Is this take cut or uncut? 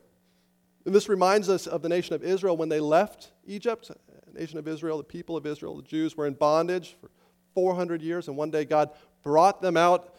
uncut